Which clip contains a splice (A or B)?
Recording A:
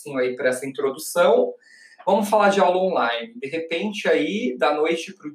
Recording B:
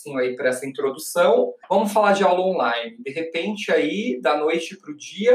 B